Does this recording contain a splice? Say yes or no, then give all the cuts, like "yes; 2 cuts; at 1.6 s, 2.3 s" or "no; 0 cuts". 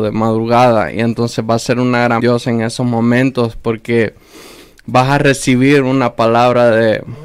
yes; 1 cut; at 2.2 s